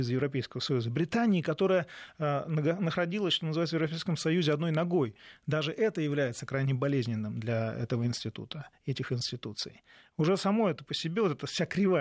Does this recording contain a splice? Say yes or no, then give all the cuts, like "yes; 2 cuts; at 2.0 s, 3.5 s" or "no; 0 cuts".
no; 0 cuts